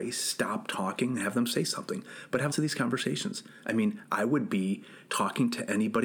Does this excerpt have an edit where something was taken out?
yes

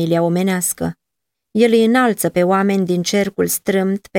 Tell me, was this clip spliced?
no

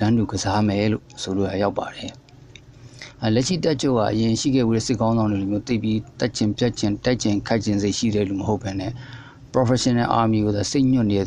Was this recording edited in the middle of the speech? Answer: no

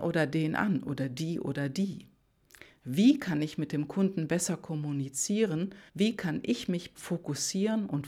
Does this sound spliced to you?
yes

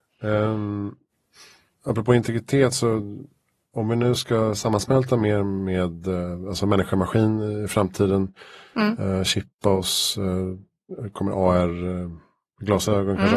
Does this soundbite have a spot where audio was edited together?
no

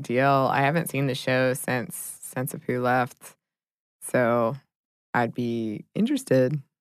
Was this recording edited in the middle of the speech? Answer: no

